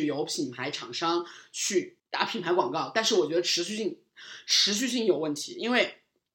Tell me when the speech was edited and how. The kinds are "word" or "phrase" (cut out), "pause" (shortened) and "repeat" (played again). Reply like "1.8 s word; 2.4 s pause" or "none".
2.0 s pause